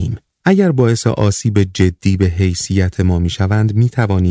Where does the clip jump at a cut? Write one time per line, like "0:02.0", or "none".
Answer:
none